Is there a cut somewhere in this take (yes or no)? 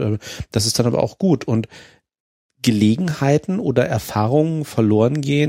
no